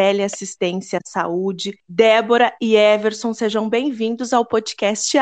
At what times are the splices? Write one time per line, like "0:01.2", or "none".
0:01.8